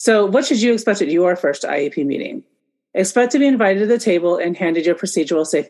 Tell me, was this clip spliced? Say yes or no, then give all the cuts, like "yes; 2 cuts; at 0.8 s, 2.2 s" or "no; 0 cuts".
no; 0 cuts